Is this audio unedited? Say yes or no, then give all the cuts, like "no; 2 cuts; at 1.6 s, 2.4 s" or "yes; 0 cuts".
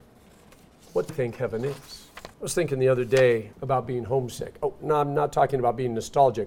no; 3 cuts; at 1.1 s, 2.3 s, 3.5 s